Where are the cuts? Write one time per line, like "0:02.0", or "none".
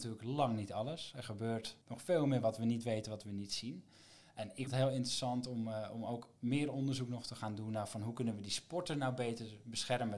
0:01.8
0:04.7
0:06.4